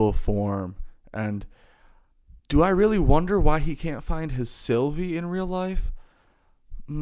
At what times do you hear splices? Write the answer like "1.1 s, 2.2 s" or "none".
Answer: 2.4 s